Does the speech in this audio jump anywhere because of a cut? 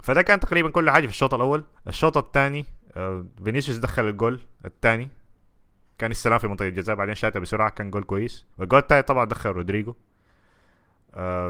yes; 3 cuts; at 1.7 s, 4.5 s, 8.5 s

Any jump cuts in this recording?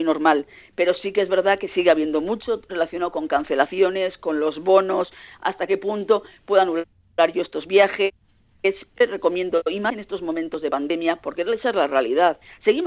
no; 0 cuts

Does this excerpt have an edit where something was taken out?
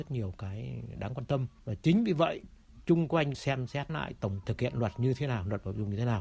yes; 3 cuts; at 3.3 s, 3.9 s, 4.4 s

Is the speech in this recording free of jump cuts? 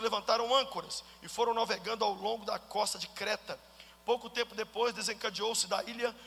yes; 0 cuts

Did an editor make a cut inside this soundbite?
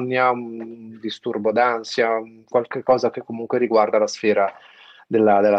no; 0 cuts

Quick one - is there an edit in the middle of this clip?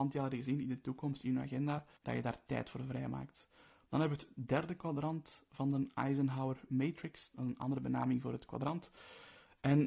yes; 1 cut; at 2.0 s

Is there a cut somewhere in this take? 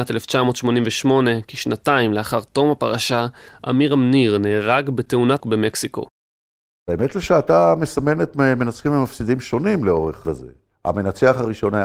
yes; 2 cuts; at 5.4 s, 10.2 s

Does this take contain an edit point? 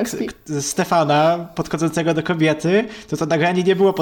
no; 0 cuts

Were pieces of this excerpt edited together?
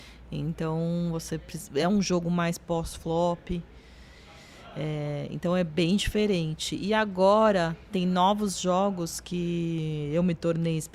no; 0 cuts

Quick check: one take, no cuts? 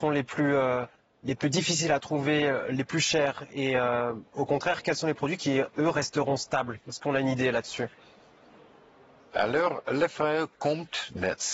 yes; 0 cuts

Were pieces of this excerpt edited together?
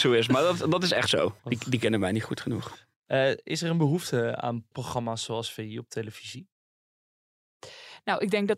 yes; 2 cuts; at 1.4 s, 4.7 s

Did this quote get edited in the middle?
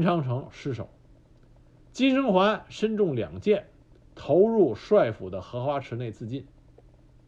no; 0 cuts

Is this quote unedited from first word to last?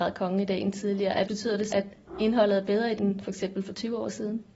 no; 3 cuts; at 1.2 s, 1.7 s, 3.0 s

